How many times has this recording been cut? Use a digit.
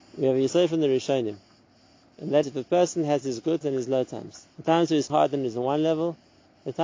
4